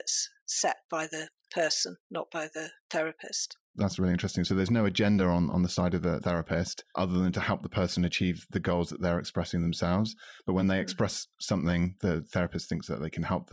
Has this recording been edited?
no; 0 cuts

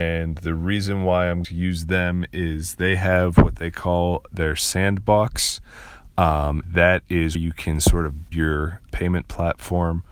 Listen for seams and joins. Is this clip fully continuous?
no; 5 cuts; at 1.4 s, 6.6 s, 7.3 s, 8.3 s, 8.9 s

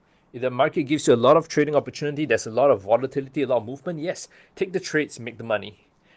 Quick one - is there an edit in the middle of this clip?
no; 0 cuts

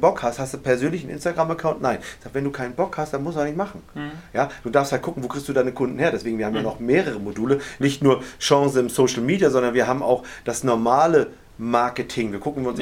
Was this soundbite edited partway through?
no; 0 cuts

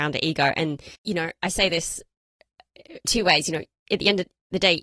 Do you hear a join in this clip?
yes; 2 cuts; at 0.9 s, 3.0 s

